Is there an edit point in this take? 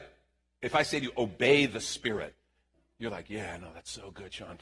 no; 0 cuts

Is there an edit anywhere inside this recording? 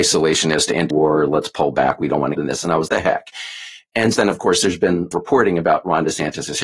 yes; 5 cuts; at 0.9 s, 2.3 s, 2.9 s, 4.2 s, 5.1 s

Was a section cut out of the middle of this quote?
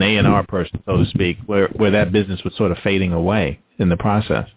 no; 0 cuts

